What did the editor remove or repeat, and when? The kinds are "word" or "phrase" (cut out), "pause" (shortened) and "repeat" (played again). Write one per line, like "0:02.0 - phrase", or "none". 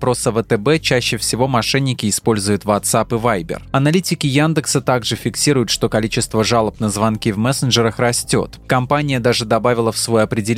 none